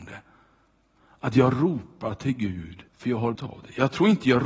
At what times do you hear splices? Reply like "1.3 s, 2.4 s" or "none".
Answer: 2.9 s, 3.3 s